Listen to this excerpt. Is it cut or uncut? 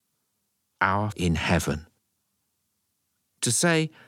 cut